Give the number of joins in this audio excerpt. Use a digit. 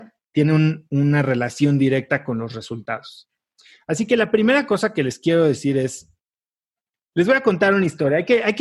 0